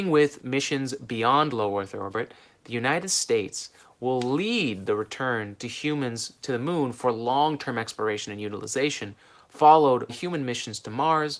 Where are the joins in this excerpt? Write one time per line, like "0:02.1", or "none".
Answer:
0:10.1

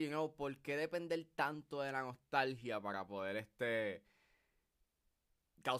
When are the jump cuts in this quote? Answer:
none

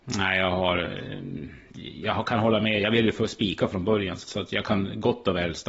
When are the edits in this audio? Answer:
0:04.2

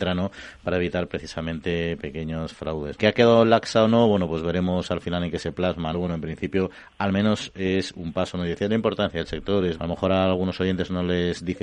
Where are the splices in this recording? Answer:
0:03.0
0:05.9
0:09.8

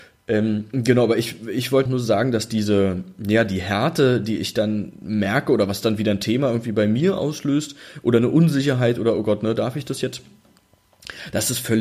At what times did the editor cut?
0:01.9

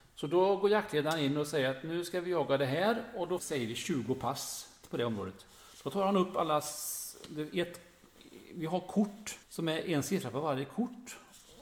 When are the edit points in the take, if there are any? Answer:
0:03.4
0:09.4

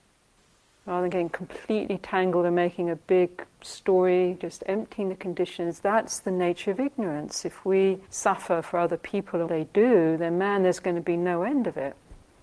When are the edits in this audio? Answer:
0:03.5
0:08.1
0:09.5

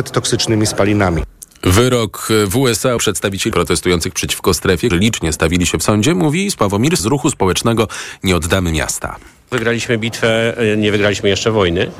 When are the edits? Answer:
0:03.0
0:03.5
0:04.9
0:07.0

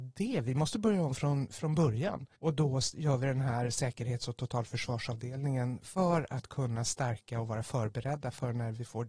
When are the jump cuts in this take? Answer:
0:02.3

